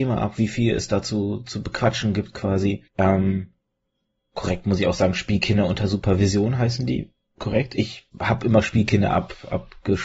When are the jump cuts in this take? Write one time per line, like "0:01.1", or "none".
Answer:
0:02.9
0:08.1